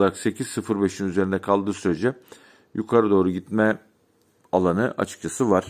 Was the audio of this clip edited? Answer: no; 0 cuts

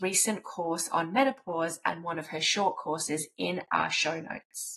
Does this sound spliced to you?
no; 0 cuts

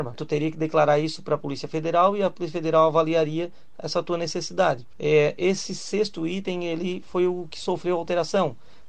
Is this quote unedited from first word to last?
yes; 0 cuts

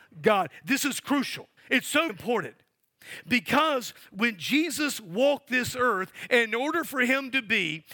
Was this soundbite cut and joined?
yes; 2 cuts; at 1.6 s, 2.1 s

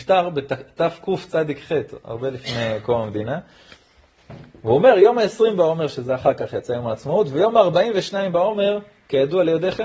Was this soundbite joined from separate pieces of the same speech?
no; 0 cuts

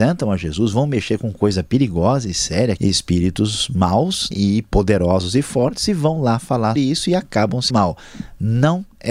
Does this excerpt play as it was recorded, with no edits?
no; 4 cuts; at 2.8 s, 4.3 s, 6.8 s, 7.7 s

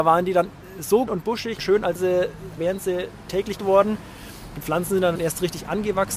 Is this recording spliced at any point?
yes; 6 cuts; at 1.1 s, 1.6 s, 2.0 s, 2.6 s, 3.6 s, 5.2 s

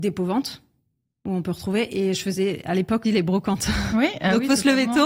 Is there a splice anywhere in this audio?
yes; 1 cut; at 3.0 s

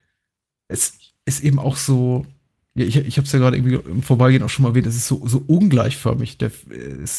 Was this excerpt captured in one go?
yes; 0 cuts

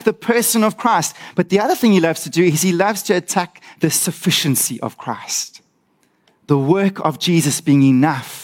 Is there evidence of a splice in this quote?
yes; 1 cut; at 5.9 s

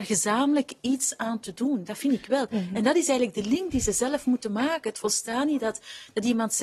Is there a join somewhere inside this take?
no; 0 cuts

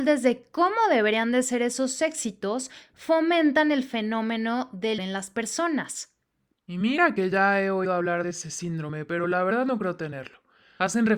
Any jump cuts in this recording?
yes; 1 cut; at 5.0 s

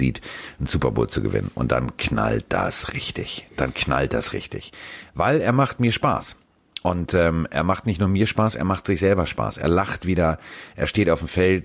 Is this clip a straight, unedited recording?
yes; 0 cuts

